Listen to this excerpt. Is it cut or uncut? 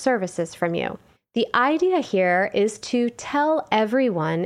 cut